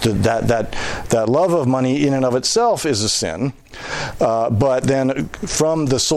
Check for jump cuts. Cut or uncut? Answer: uncut